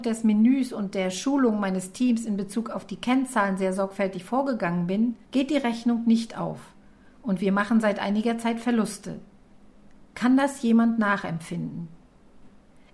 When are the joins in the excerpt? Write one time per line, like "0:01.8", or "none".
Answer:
0:05.2